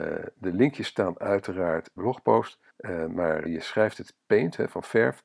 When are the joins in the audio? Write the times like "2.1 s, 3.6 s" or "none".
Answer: 2.0 s, 2.7 s, 3.4 s